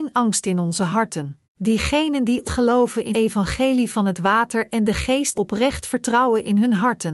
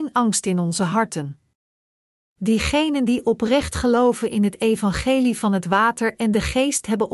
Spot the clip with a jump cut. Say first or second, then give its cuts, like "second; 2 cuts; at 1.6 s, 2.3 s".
first; 4 cuts; at 1.4 s, 2.4 s, 3.1 s, 5.3 s